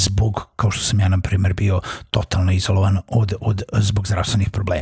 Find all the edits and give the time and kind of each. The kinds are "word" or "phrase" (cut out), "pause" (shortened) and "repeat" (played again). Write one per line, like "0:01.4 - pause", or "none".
none